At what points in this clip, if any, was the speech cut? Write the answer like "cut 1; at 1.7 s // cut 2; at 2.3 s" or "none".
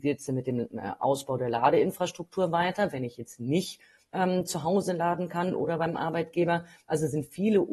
none